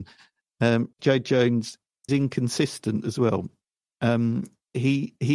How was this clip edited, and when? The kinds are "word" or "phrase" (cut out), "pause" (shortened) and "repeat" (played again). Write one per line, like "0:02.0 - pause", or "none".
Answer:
0:00.9 - word
0:02.1 - word